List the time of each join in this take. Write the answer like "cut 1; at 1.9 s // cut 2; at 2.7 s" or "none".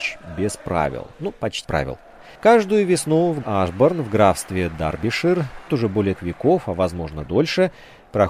cut 1; at 1.6 s // cut 2; at 2.4 s // cut 3; at 3.4 s // cut 4; at 5.7 s // cut 5; at 6.2 s // cut 6; at 7.3 s